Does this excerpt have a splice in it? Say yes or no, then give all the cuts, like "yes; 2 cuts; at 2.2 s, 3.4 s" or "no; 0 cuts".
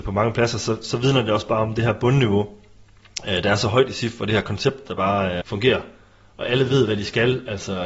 yes; 1 cut; at 5.4 s